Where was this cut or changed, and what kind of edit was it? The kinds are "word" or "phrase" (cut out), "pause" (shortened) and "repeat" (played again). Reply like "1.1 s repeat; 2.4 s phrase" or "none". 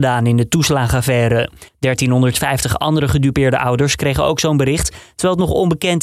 1.7 s pause